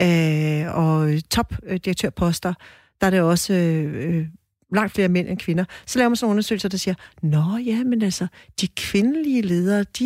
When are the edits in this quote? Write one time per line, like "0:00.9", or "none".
none